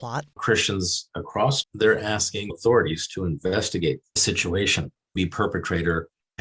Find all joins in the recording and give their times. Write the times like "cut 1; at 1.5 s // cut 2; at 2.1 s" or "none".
cut 1; at 1.6 s // cut 2; at 2.5 s // cut 3; at 4.2 s // cut 4; at 5.2 s